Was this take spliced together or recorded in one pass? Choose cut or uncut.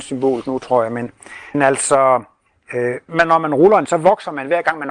cut